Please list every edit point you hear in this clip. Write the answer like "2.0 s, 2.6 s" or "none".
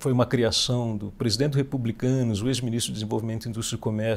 none